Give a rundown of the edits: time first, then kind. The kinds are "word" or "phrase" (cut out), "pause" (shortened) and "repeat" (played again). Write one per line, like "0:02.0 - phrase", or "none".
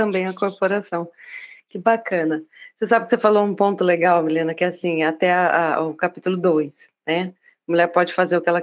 none